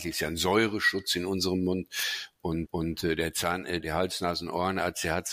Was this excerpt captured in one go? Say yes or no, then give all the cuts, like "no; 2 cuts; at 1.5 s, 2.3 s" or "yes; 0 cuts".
no; 2 cuts; at 2.7 s, 3.8 s